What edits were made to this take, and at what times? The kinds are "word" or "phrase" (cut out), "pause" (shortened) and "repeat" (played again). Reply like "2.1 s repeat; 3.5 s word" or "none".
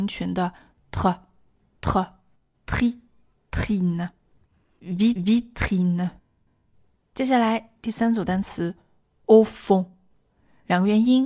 5.2 s repeat